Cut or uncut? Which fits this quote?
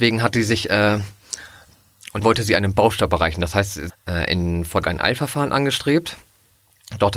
cut